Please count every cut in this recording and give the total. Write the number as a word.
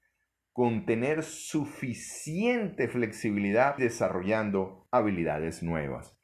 one